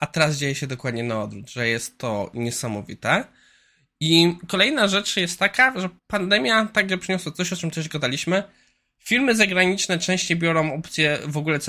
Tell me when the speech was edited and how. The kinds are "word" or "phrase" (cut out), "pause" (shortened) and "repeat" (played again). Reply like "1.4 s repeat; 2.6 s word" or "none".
6.0 s pause